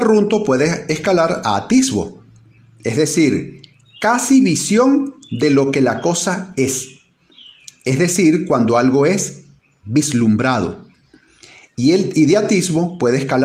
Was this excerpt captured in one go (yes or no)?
yes